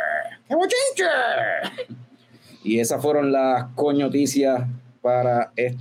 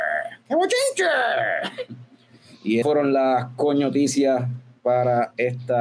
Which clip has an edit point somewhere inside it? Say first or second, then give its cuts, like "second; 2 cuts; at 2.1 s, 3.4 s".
second; 1 cut; at 2.8 s